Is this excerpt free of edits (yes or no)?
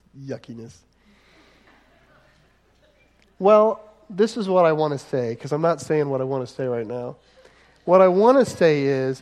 yes